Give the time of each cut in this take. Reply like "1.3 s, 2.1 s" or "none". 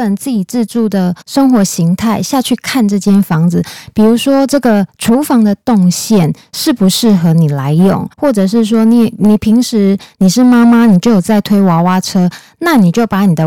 1.2 s, 8.1 s